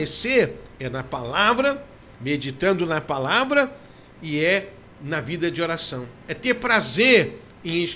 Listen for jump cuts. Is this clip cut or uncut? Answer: uncut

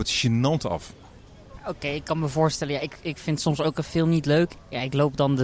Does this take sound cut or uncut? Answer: uncut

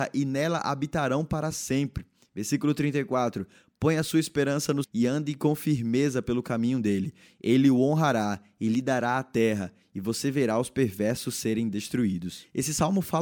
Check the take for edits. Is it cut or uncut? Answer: cut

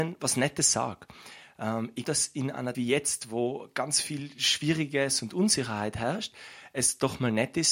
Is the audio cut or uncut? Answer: cut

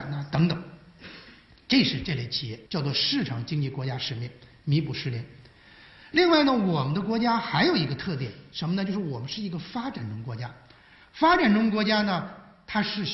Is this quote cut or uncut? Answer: cut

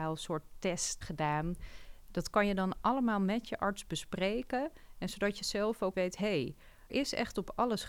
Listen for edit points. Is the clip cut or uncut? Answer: cut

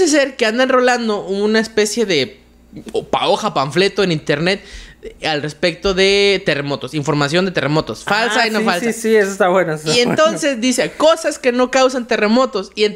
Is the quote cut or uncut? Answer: uncut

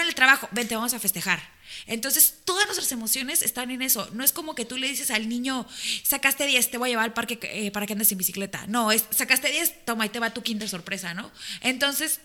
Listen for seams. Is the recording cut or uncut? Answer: uncut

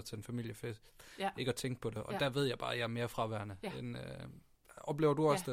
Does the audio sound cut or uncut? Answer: uncut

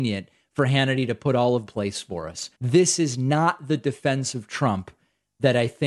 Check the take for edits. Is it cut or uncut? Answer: cut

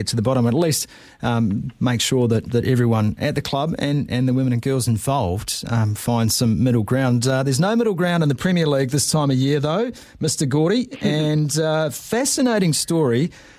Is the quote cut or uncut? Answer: uncut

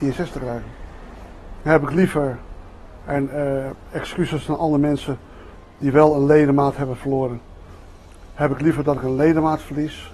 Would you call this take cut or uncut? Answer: uncut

